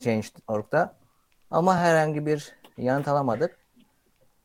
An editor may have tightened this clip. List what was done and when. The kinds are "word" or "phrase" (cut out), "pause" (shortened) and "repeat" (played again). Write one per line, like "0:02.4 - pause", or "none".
none